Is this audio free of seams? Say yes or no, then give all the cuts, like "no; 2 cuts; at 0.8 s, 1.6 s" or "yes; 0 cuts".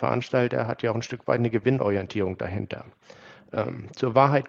yes; 0 cuts